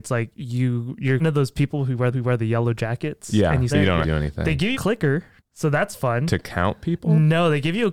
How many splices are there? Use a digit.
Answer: 6